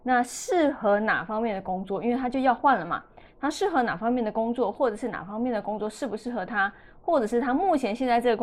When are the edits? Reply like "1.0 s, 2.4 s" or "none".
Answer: none